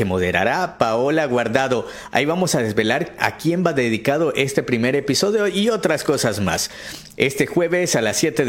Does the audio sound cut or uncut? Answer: cut